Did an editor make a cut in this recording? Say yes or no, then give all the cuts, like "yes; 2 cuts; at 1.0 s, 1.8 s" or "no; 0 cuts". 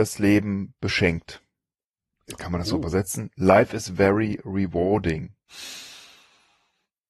no; 0 cuts